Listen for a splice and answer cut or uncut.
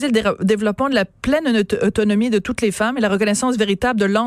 uncut